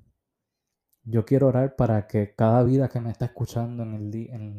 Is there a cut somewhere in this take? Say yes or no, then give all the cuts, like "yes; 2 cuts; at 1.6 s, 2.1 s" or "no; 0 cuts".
no; 0 cuts